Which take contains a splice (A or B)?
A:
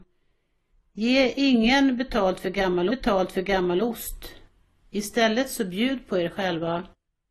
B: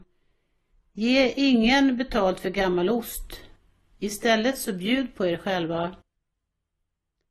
A